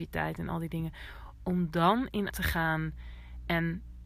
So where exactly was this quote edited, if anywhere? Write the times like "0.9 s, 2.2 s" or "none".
2.3 s